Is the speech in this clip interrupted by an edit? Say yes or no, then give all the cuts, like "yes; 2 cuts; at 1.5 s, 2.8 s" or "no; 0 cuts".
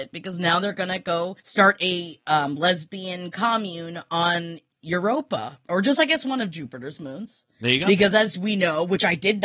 yes; 1 cut; at 1.4 s